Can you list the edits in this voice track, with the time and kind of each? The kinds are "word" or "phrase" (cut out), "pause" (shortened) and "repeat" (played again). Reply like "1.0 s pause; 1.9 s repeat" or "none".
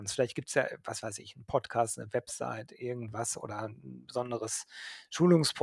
none